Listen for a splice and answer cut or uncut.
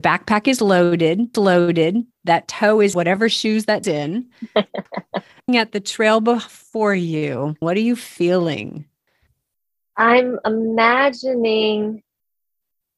cut